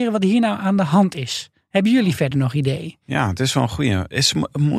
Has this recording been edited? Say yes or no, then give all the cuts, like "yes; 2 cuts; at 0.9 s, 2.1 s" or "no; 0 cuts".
no; 0 cuts